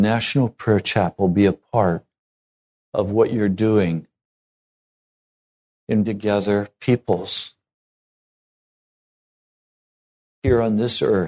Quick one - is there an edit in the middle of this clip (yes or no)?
yes